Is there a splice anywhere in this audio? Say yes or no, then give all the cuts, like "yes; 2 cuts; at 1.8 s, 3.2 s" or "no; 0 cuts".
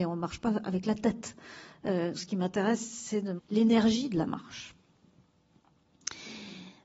yes; 2 cuts; at 2.1 s, 3.4 s